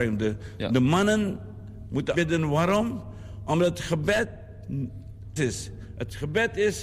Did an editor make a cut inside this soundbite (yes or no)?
yes